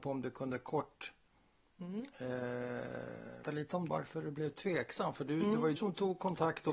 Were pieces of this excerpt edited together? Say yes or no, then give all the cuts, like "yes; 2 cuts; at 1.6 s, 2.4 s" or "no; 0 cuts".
yes; 3 cuts; at 3.4 s, 3.9 s, 5.8 s